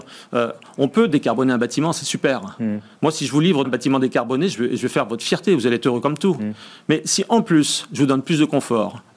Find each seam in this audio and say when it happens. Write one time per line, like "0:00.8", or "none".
0:03.6

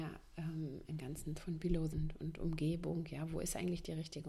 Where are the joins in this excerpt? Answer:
0:01.0
0:01.4
0:01.9

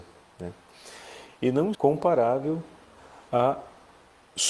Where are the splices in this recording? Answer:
0:01.7

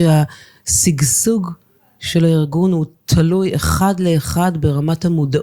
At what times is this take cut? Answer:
none

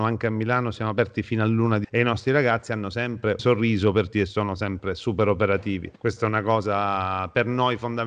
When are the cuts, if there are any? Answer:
0:01.8
0:03.4
0:04.1
0:06.0

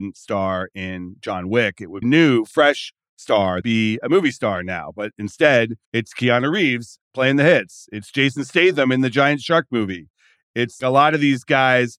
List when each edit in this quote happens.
0:02.0
0:03.6
0:05.8
0:07.0
0:10.8

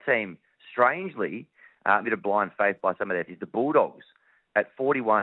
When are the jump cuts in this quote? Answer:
0:02.0
0:03.3

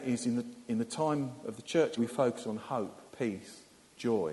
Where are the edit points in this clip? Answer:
0:02.0
0:03.1

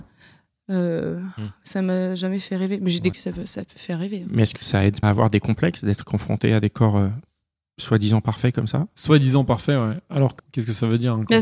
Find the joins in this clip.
0:03.1
0:04.6
0:05.0
0:10.4

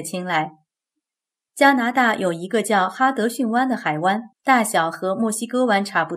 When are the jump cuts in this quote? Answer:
0:04.3

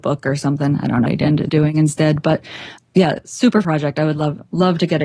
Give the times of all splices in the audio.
0:01.0
0:01.5
0:02.8
0:03.6

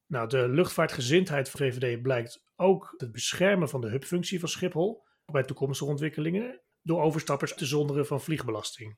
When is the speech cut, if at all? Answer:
0:01.6
0:03.0
0:05.3
0:06.7
0:07.6

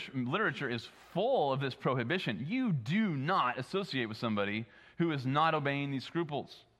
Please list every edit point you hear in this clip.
none

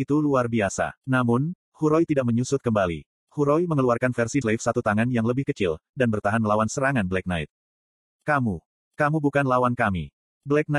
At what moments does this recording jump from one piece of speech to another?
0:04.4

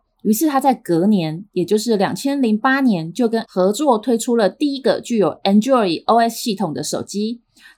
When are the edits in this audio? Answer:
0:03.4

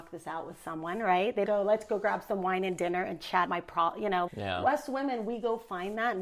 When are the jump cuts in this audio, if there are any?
0:01.5
0:03.5
0:04.3

